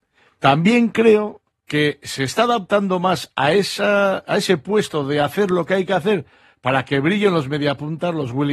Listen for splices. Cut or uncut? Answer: cut